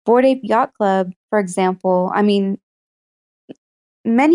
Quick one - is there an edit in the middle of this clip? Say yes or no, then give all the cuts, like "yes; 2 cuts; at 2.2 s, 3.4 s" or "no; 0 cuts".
yes; 1 cut; at 1.2 s